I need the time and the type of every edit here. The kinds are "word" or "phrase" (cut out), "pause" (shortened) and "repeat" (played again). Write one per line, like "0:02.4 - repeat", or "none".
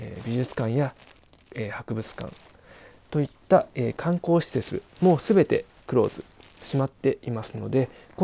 0:04.9 - pause